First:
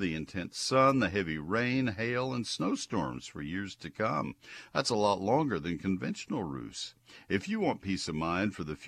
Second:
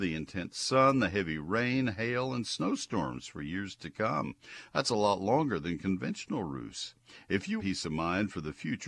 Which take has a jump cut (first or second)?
second